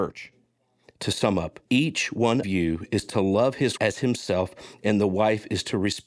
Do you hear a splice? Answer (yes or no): yes